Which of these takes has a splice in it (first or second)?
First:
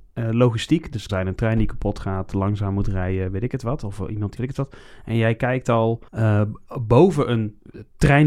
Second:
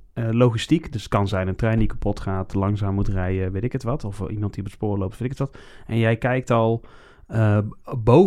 first